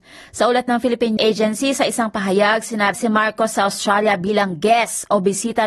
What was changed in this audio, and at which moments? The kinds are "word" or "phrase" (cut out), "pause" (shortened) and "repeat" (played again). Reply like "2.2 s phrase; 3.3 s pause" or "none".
1.2 s word; 2.9 s phrase

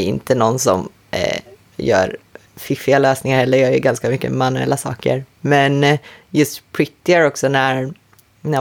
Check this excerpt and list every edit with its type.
none

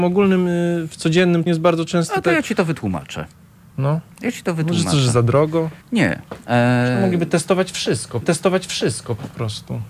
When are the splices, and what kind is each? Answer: 1.5 s word; 4.1 s pause; 5.8 s pause; 8.2 s repeat

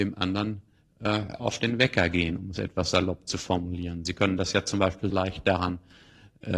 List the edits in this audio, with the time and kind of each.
5.1 s word

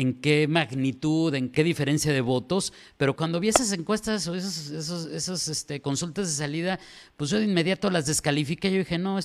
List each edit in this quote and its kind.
1.5 s phrase; 3.2 s word

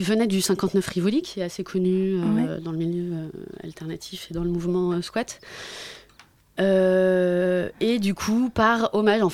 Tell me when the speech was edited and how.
none

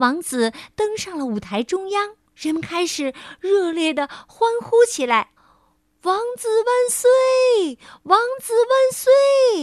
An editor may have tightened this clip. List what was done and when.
2.3 s pause; 5.4 s pause

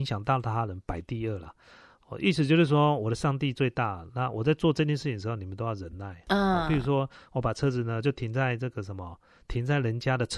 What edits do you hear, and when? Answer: none

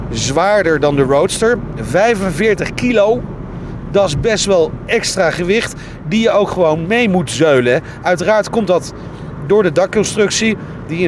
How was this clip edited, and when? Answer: none

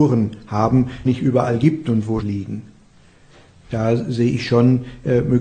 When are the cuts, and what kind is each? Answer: 1.1 s phrase; 2.2 s word

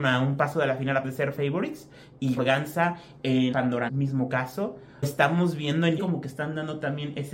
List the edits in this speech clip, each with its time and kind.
1.0 s word; 1.4 s word; 2.4 s word; 3.5 s word; 3.9 s word; 5.0 s word; 6.0 s word

